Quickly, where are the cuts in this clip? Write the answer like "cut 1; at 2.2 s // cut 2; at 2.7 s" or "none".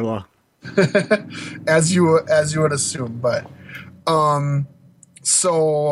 none